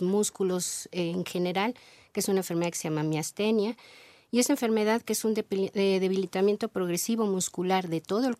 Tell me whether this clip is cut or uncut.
uncut